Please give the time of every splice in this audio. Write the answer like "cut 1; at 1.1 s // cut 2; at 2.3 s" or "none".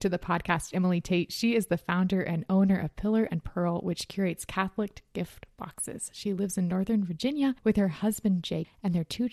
none